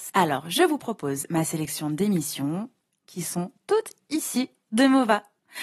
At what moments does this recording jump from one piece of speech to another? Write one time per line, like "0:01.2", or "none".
none